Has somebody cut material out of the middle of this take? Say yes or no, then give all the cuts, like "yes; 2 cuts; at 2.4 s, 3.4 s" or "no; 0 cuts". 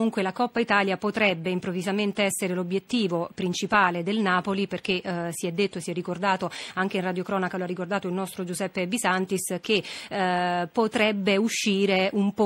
no; 0 cuts